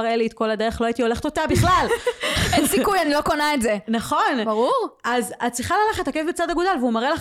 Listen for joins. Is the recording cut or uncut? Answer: uncut